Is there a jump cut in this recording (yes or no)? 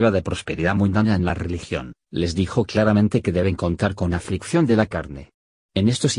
no